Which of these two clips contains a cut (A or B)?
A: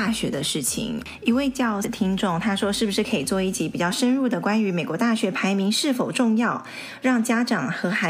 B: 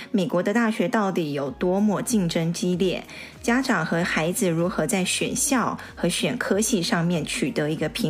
A